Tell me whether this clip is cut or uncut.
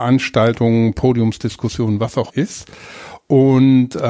cut